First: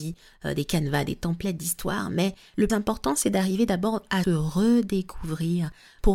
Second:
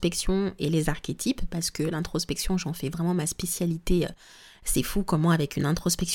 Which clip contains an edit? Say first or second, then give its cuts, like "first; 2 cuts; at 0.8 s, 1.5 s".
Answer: first; 2 cuts; at 2.7 s, 4.2 s